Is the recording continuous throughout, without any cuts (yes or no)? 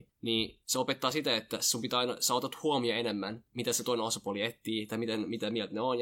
yes